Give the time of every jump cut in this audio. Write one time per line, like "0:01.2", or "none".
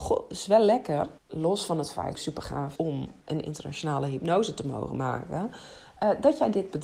0:01.2
0:02.1
0:02.8
0:03.2

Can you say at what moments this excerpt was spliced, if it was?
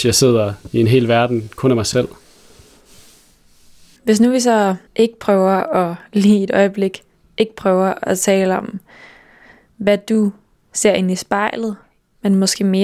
0:04.9

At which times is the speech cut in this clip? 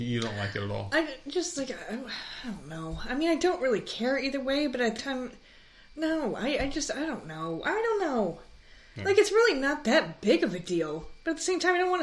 0:05.0

